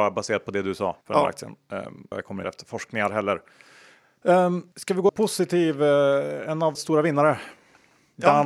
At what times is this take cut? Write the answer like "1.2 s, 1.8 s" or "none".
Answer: 1.0 s, 2.1 s, 2.4 s, 4.7 s, 5.1 s, 6.7 s